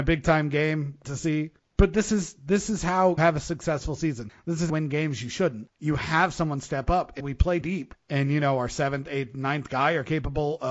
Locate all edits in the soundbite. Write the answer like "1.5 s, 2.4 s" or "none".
1.0 s, 3.2 s, 4.7 s, 7.6 s